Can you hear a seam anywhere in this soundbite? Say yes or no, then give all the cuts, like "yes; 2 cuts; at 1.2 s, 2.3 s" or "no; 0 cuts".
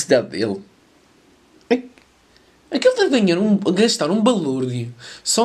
no; 0 cuts